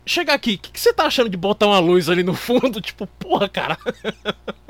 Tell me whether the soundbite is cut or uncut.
uncut